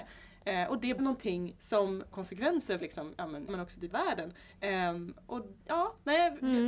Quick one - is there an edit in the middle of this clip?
yes; 7 cuts; at 1.0 s, 2.1 s, 2.8 s, 3.5 s, 3.9 s, 4.5 s, 5.6 s

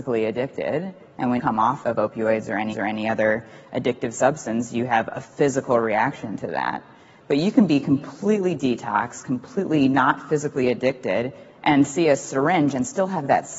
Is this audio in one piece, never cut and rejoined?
no; 3 cuts; at 1.4 s, 1.8 s, 2.7 s

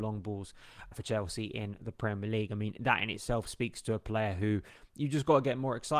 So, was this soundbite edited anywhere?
yes; 1 cut; at 0.9 s

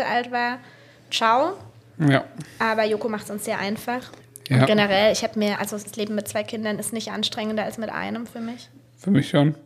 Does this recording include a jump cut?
yes; 1 cut; at 4.2 s

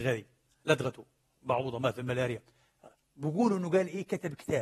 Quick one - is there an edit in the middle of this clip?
no; 0 cuts

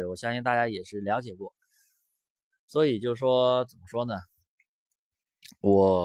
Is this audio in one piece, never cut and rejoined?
yes; 0 cuts

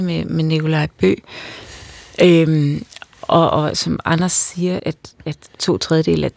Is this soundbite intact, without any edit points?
no; 1 cut; at 4.8 s

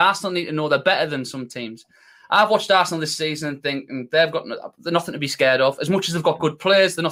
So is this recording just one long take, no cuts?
yes; 0 cuts

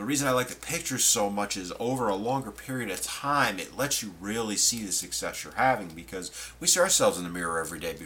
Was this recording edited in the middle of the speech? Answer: no; 0 cuts

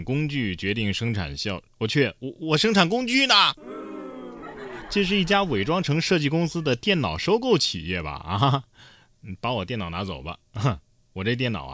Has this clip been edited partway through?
yes; 1 cut; at 1.7 s

